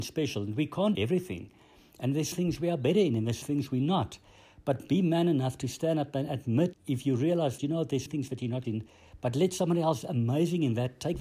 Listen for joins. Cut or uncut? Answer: cut